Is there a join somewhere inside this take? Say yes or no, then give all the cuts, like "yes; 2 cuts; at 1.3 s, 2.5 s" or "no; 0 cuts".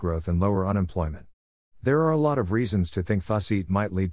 no; 0 cuts